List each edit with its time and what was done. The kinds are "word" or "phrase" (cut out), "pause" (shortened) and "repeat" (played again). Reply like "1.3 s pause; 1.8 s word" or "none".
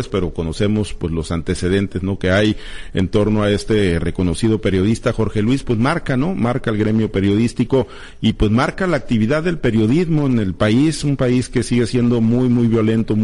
none